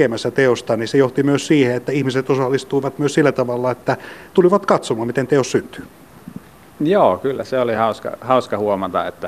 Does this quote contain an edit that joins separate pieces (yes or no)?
no